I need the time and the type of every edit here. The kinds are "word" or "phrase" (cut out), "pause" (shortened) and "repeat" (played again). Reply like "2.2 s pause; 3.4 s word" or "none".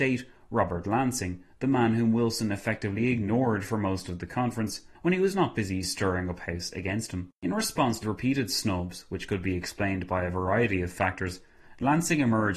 4.9 s pause; 7.4 s pause; 8.0 s word